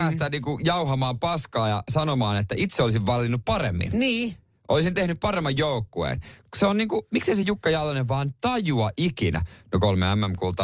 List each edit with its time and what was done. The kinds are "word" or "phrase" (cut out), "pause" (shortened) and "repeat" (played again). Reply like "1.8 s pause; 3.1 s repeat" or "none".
none

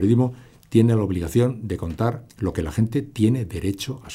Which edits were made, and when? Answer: 2.3 s pause

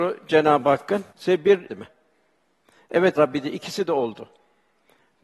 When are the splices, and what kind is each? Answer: 1.1 s pause; 1.7 s phrase; 3.2 s word

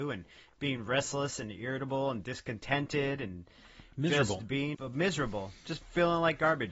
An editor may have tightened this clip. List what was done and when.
4.7 s word

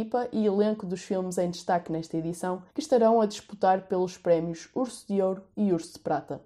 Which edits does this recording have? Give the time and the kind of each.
2.7 s pause

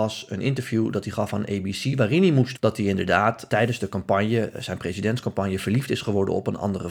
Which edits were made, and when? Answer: 2.6 s word; 3.5 s word

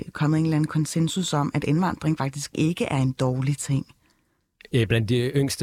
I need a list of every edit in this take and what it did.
none

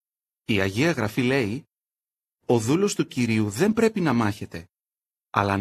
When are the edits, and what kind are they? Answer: none

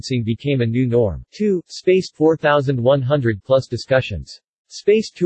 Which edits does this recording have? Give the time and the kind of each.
1.3 s pause; 2.1 s word

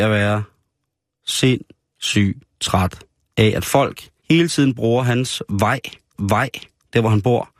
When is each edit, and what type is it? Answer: 4.2 s pause; 6.1 s repeat

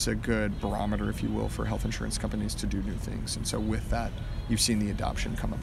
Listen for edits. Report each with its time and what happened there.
none

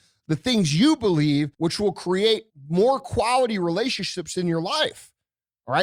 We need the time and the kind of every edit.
1.5 s pause; 2.5 s pause

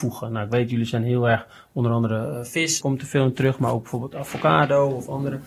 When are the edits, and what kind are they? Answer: 2.8 s word

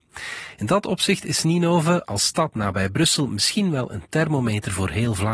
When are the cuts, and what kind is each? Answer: none

